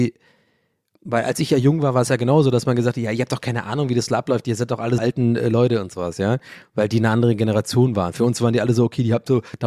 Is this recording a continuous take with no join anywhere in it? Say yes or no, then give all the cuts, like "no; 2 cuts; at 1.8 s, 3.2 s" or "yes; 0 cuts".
no; 1 cut; at 5.0 s